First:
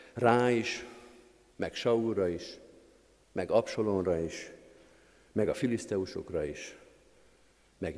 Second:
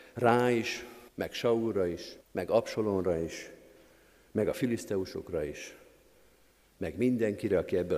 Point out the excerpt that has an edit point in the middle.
second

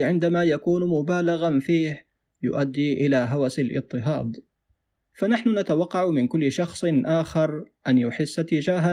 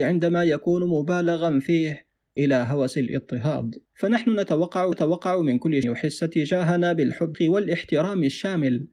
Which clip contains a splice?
second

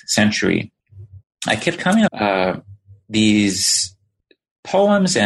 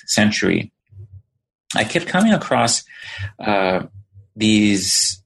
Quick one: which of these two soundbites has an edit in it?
first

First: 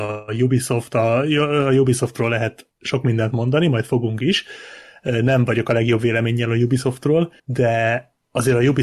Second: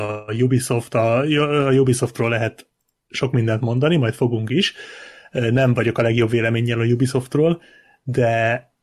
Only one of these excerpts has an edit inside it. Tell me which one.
first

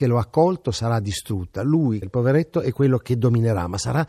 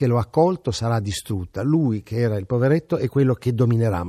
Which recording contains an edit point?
first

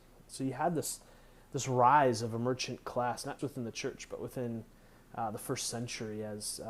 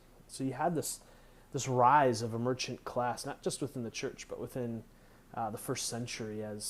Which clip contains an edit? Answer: first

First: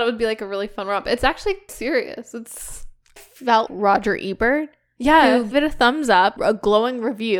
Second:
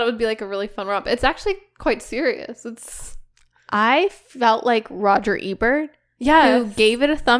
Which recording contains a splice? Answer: first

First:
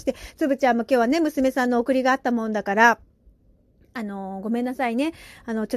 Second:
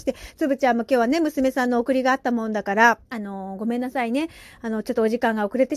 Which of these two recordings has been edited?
second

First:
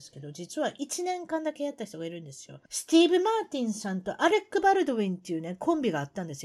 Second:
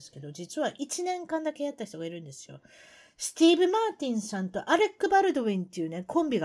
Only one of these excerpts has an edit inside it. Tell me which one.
first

